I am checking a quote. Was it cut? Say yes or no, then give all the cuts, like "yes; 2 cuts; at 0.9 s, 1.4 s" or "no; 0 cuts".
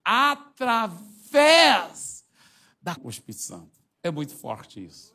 yes; 1 cut; at 3.0 s